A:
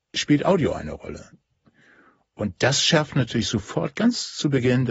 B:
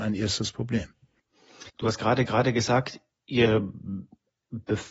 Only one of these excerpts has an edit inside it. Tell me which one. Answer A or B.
B